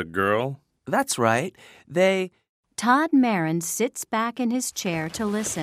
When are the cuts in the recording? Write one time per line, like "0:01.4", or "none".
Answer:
none